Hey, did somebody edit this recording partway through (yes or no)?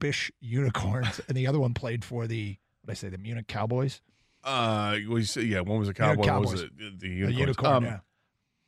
yes